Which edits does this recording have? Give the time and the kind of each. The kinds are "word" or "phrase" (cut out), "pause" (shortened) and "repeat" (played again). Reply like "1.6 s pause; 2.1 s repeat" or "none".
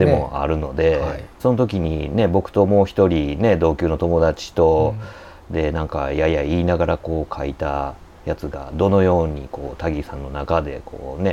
1.4 s word